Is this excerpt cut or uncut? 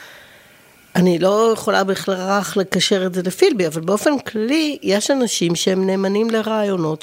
uncut